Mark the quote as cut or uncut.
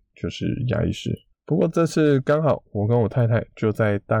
cut